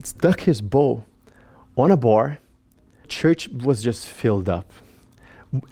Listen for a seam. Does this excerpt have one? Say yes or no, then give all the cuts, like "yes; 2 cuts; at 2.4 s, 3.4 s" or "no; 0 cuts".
yes; 1 cut; at 3.0 s